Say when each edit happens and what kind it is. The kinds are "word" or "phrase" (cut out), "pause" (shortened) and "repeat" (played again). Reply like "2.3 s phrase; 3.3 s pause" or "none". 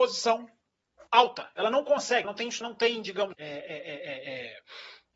1.1 s pause; 2.2 s word; 2.6 s word; 3.3 s word